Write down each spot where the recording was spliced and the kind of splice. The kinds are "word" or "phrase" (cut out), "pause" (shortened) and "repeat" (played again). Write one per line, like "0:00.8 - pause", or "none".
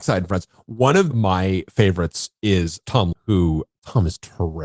0:03.1 - word